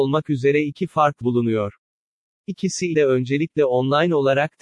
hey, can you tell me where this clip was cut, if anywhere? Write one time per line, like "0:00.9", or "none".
0:01.2
0:02.9